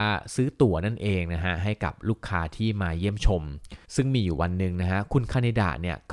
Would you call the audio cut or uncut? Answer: cut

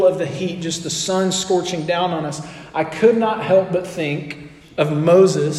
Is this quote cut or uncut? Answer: uncut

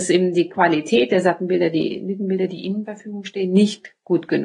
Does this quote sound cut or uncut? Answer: cut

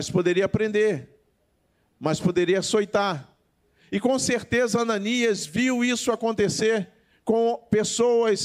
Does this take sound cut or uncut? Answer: uncut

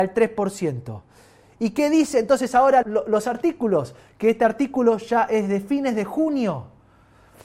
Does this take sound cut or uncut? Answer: cut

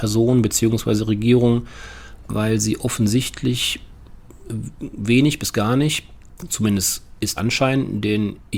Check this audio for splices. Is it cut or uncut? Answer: cut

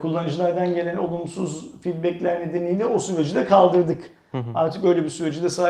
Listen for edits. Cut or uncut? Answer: uncut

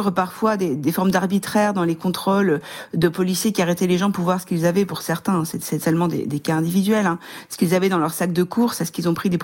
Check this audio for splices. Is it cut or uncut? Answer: uncut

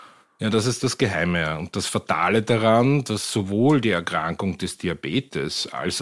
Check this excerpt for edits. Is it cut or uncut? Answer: uncut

